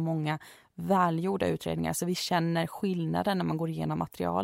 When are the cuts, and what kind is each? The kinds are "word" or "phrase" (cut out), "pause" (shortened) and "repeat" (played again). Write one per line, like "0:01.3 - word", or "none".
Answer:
none